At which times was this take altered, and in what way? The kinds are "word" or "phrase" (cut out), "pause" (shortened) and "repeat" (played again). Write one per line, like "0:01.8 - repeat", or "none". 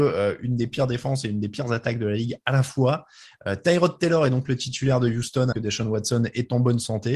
0:05.5 - word